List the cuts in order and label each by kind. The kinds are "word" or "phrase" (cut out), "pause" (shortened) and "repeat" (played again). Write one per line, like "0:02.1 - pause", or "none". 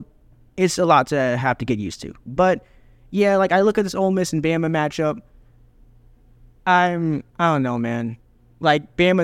none